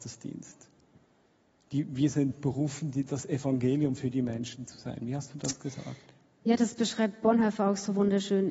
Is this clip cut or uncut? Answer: uncut